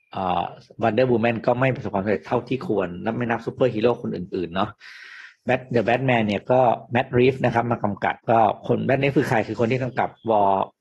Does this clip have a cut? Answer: yes; 1 cut; at 8.2 s

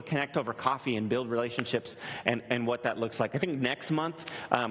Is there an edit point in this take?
yes; 1 cut; at 2.5 s

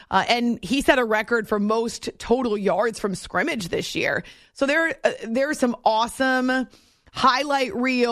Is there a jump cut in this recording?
no; 0 cuts

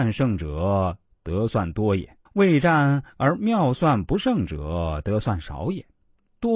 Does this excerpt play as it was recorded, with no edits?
no; 1 cut; at 2.3 s

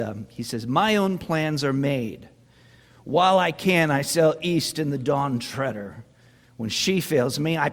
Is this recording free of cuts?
yes; 0 cuts

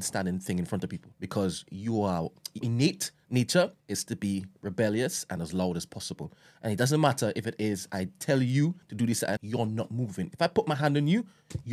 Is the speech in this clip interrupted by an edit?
yes; 5 cuts; at 1.1 s, 2.6 s, 3.8 s, 8.8 s, 9.4 s

